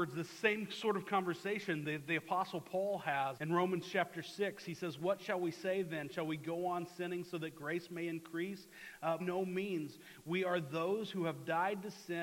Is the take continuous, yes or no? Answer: no